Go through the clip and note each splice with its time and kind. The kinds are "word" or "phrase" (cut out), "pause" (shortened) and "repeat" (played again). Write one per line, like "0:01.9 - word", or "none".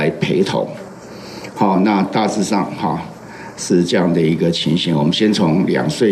none